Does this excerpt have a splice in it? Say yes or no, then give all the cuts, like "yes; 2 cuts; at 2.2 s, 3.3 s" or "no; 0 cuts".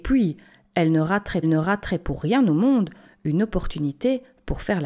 yes; 1 cut; at 1.4 s